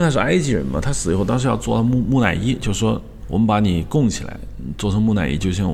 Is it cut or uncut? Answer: cut